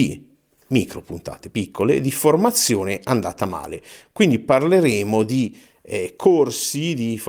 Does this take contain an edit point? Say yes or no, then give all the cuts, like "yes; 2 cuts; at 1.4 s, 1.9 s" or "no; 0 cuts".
no; 0 cuts